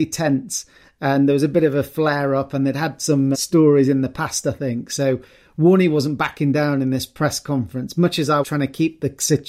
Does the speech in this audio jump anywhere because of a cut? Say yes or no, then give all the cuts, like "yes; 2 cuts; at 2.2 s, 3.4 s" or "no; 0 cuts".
yes; 2 cuts; at 3.3 s, 8.4 s